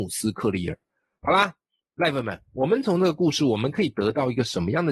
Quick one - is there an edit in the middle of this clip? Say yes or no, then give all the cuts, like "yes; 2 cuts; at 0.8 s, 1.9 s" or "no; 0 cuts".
yes; 1 cut; at 1.8 s